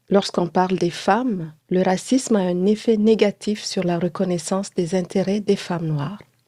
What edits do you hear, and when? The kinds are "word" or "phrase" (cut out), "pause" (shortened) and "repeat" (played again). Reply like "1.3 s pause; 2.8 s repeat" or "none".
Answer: 1.6 s pause

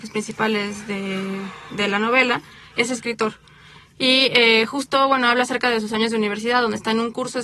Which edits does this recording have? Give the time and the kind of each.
none

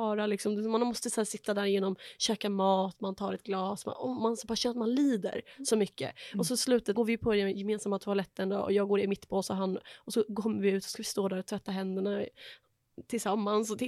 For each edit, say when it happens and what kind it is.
6.9 s word

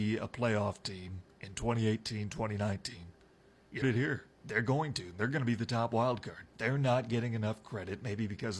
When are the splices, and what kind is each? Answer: 3.8 s word; 4.3 s pause; 6.5 s phrase

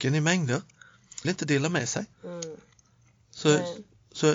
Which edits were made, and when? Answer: 1.2 s phrase; 2.1 s pause

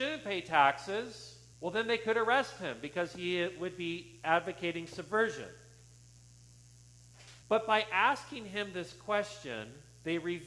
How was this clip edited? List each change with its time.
1.5 s pause; 7.4 s pause

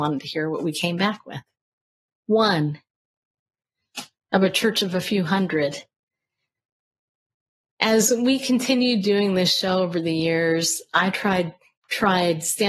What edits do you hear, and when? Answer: none

